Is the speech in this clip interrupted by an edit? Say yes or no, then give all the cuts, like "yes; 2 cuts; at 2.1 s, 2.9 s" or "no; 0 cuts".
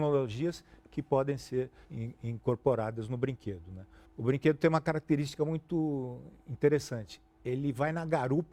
yes; 2 cuts; at 1.8 s, 4.0 s